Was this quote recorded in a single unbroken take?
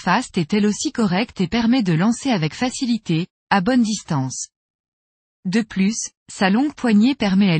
yes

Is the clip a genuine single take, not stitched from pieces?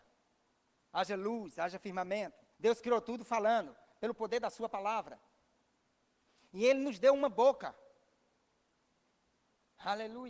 no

